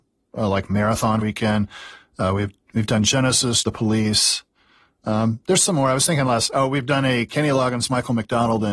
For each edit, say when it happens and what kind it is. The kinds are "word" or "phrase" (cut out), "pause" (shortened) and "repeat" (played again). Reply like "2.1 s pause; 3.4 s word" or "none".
1.2 s phrase; 3.6 s phrase